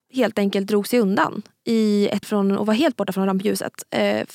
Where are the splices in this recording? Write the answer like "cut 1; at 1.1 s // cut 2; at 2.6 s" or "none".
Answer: cut 1; at 2.2 s

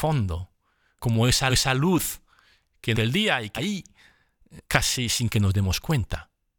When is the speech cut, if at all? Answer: cut 1; at 1.0 s // cut 2; at 1.5 s // cut 3; at 2.9 s // cut 4; at 3.6 s // cut 5; at 4.6 s

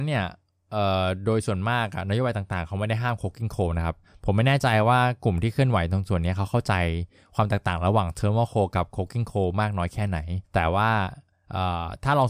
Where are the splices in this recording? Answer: cut 1; at 10.4 s

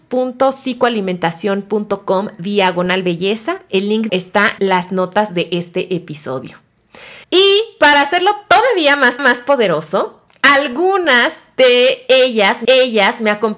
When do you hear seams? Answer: cut 1; at 4.1 s // cut 2; at 4.6 s // cut 3; at 7.2 s // cut 4; at 9.2 s // cut 5; at 12.6 s

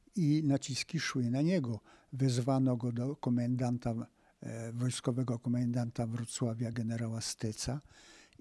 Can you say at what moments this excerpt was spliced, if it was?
none

